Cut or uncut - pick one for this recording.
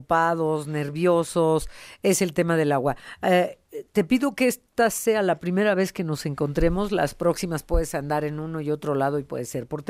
uncut